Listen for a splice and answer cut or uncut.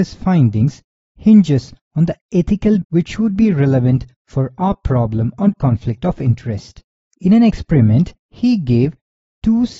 cut